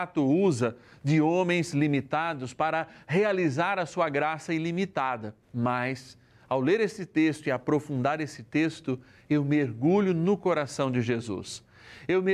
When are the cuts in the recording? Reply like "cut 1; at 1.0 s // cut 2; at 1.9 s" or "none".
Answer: cut 1; at 5.4 s